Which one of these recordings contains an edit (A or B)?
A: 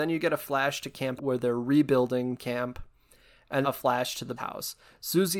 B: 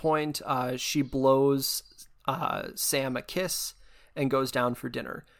A